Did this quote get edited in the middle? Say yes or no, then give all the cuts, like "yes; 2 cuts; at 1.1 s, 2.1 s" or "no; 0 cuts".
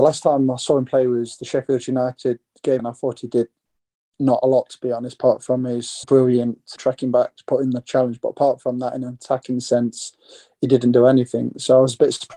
yes; 3 cuts; at 2.8 s, 6.0 s, 6.8 s